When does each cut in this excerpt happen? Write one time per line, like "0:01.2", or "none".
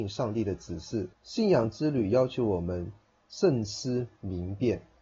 0:01.1